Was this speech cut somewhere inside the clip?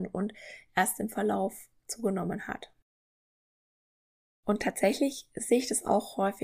no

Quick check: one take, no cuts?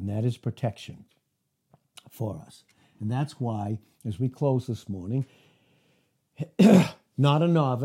yes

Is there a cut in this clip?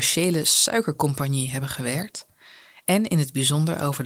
no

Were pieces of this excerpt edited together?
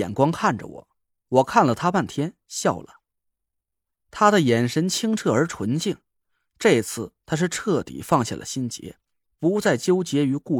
no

